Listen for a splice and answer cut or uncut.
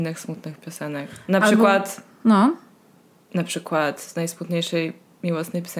uncut